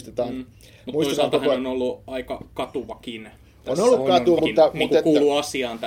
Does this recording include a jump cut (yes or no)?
yes